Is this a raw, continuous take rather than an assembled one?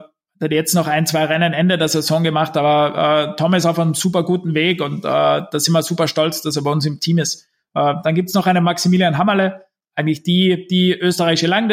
yes; 0 cuts

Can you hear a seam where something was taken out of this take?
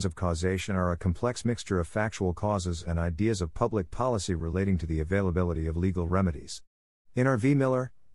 no; 0 cuts

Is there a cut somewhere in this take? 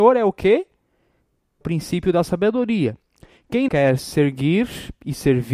yes; 2 cuts; at 1.6 s, 3.7 s

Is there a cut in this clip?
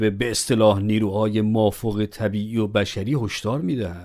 no; 0 cuts

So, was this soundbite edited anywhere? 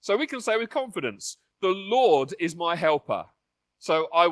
no; 0 cuts

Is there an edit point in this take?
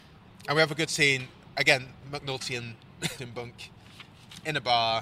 yes; 1 cut; at 3.2 s

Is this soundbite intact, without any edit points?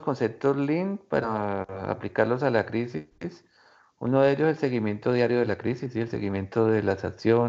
yes; 0 cuts

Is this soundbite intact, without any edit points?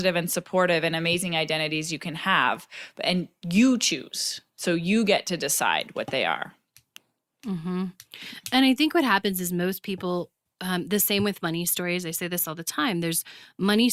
yes; 0 cuts

